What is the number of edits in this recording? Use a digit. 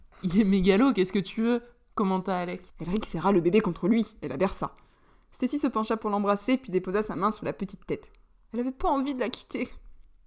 1